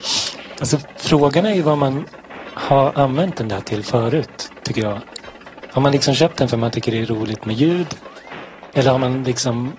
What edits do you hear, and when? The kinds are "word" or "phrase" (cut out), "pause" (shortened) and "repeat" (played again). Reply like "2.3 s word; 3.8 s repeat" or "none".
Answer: none